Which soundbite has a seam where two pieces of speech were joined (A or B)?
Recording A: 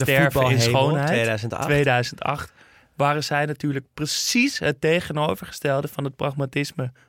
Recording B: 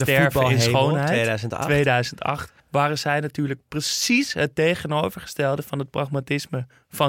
B